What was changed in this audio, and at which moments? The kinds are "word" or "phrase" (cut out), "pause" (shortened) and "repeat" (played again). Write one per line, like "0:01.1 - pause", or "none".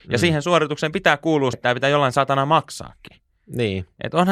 0:01.5 - word

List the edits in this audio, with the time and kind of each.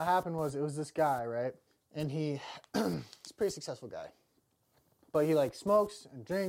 none

